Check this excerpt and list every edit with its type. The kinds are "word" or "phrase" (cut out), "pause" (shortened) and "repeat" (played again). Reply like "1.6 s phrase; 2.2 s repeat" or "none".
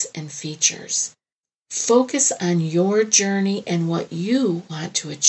none

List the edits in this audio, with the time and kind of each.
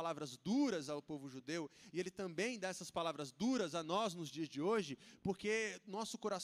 none

